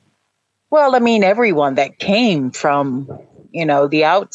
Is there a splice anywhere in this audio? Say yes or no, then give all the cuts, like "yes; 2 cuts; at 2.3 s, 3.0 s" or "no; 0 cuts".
no; 0 cuts